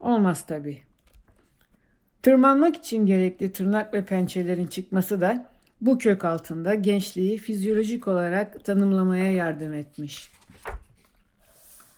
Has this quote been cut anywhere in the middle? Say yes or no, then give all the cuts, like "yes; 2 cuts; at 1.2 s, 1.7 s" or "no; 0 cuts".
no; 0 cuts